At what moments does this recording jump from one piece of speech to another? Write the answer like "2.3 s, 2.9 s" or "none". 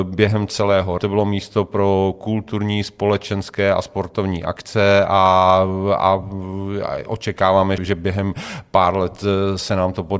1.0 s, 7.8 s